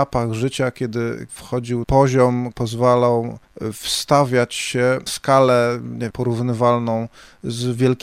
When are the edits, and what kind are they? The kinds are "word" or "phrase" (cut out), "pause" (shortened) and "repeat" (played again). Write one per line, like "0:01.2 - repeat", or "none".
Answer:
0:01.3 - word
0:01.8 - word
0:02.5 - word
0:05.1 - word
0:06.1 - word